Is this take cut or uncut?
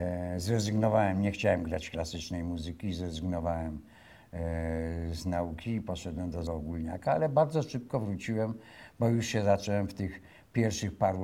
cut